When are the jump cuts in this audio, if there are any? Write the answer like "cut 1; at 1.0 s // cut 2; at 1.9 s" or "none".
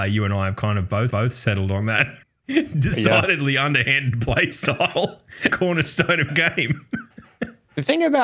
cut 1; at 1.1 s // cut 2; at 2.2 s // cut 3; at 5.5 s // cut 4; at 6.3 s